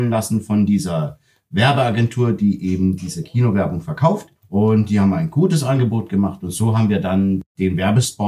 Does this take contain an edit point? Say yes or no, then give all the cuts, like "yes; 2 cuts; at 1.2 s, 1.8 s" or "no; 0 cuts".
yes; 1 cut; at 4.4 s